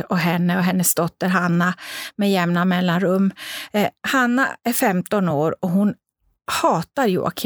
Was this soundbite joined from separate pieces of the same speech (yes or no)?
no